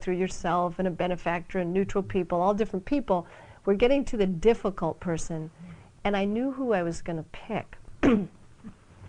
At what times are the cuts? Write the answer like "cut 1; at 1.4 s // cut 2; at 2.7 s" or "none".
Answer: none